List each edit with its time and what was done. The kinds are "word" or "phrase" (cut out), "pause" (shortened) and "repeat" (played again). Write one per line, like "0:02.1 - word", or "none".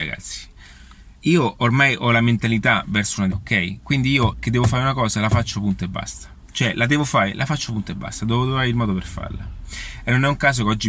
0:01.1 - pause
0:03.3 - word
0:04.3 - word